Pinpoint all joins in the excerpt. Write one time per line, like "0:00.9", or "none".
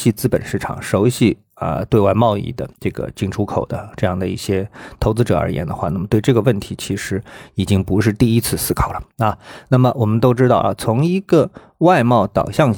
0:02.8
0:09.1